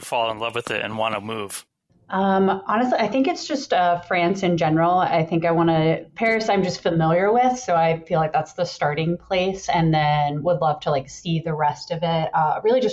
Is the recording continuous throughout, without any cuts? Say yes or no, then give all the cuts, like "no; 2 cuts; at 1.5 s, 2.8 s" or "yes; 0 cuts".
yes; 0 cuts